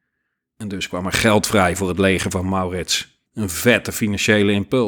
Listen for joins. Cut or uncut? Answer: cut